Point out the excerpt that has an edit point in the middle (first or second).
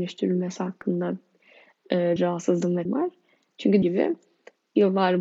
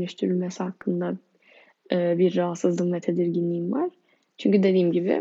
first